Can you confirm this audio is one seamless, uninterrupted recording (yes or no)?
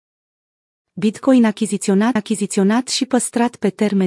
no